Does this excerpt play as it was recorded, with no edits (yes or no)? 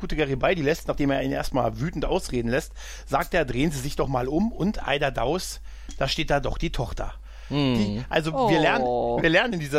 yes